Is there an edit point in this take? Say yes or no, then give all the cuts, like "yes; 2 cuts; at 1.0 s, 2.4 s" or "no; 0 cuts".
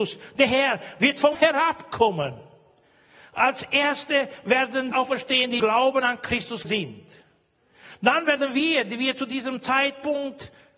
yes; 4 cuts; at 1.3 s, 4.9 s, 5.6 s, 6.6 s